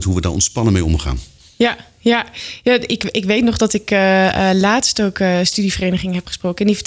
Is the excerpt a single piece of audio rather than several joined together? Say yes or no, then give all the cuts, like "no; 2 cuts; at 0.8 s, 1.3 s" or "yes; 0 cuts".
yes; 0 cuts